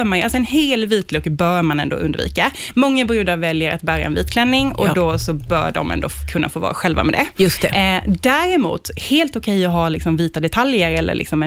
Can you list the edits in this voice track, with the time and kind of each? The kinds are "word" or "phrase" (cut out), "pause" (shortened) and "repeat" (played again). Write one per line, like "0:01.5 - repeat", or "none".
none